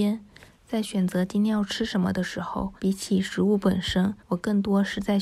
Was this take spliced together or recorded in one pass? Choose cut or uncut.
cut